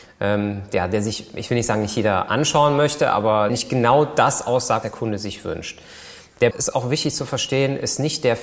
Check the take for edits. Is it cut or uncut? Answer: cut